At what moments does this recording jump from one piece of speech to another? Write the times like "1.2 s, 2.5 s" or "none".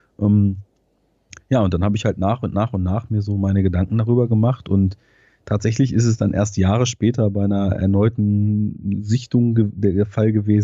none